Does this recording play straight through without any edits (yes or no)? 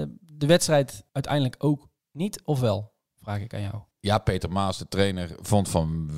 no